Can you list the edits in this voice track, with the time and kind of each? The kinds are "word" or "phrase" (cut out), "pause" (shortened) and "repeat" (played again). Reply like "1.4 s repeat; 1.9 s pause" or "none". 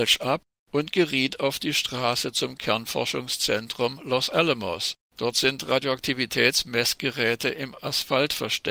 5.1 s pause